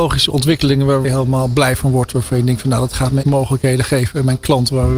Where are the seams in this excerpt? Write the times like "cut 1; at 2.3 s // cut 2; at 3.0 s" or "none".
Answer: cut 1; at 1.0 s // cut 2; at 3.2 s